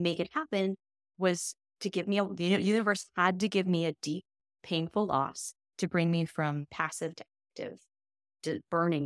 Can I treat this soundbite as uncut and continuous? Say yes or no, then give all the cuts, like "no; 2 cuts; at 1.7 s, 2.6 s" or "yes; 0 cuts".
yes; 0 cuts